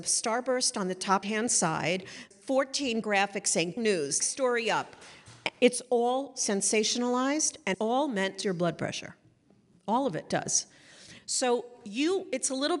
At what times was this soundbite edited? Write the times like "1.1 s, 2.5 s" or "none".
1.2 s, 2.3 s, 3.0 s, 3.8 s, 4.2 s, 7.7 s, 8.4 s